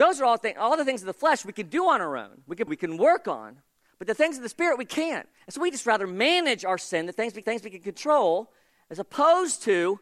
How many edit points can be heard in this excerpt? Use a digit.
2